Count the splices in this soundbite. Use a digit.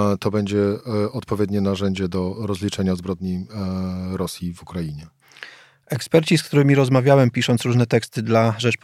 0